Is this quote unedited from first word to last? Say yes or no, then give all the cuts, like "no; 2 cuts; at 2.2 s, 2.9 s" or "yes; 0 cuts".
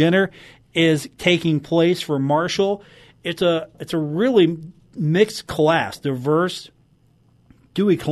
yes; 0 cuts